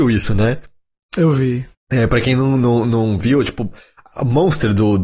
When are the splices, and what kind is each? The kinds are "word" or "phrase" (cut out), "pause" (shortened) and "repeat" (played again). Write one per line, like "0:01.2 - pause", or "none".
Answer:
0:01.7 - pause